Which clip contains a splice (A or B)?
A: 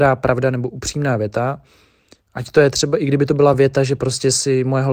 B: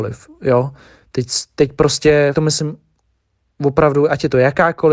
B